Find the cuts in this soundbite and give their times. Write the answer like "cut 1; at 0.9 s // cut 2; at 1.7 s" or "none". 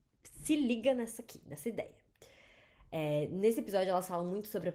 none